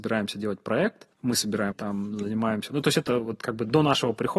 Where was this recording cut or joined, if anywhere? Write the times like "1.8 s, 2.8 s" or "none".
1.1 s, 1.7 s